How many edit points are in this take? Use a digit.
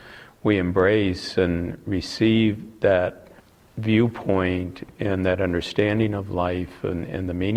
0